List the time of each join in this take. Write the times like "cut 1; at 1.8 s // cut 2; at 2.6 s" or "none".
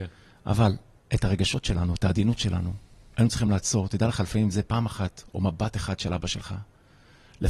none

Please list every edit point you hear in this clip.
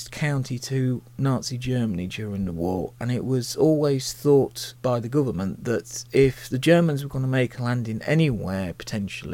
cut 1; at 4.8 s

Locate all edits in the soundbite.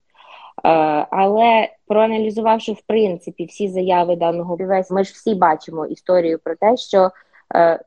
cut 1; at 4.6 s // cut 2; at 4.9 s

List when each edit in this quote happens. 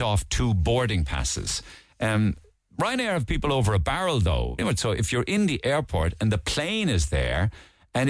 cut 1; at 4.6 s

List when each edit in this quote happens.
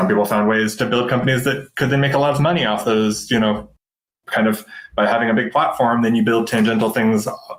none

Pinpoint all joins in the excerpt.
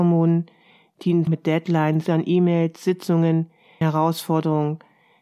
cut 1; at 1.3 s // cut 2; at 2.1 s // cut 3; at 3.8 s

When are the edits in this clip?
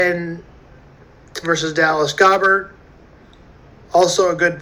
cut 1; at 1.4 s

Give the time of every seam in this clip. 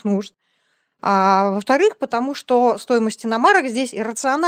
none

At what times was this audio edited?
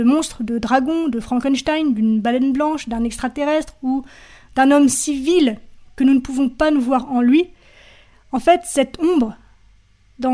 none

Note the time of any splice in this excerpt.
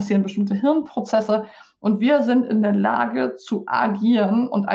none

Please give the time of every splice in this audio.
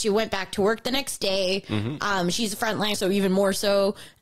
cut 1; at 2.9 s

